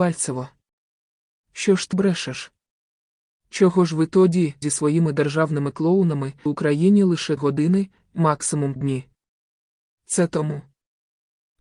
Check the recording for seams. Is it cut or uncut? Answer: cut